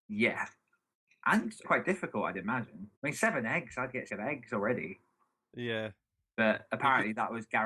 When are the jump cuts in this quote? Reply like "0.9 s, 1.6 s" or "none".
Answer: 1.6 s, 3.0 s, 4.1 s